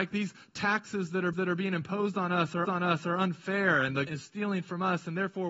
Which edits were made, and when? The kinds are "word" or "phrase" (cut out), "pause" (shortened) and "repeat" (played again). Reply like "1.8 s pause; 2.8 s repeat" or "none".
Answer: 1.3 s repeat; 2.6 s repeat; 4.1 s word